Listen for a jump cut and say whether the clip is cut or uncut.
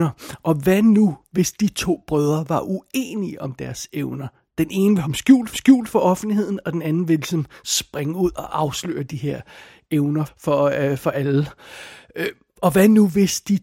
cut